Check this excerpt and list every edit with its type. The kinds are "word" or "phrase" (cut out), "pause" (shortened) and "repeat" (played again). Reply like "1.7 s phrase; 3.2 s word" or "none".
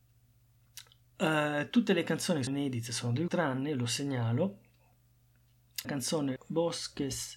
2.5 s word; 3.3 s word; 5.8 s word; 6.4 s word